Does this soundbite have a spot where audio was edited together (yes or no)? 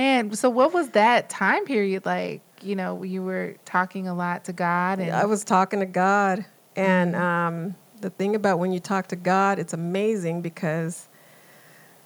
no